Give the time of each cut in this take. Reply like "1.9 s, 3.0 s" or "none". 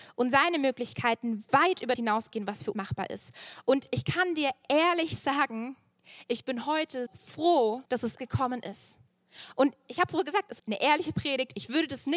1.9 s, 2.7 s, 7.1 s, 7.9 s, 8.2 s, 10.6 s